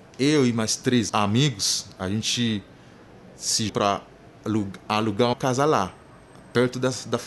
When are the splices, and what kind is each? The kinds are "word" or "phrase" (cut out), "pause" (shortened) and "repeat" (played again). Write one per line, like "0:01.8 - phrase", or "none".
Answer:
0:01.1 - word
0:03.7 - word
0:05.3 - word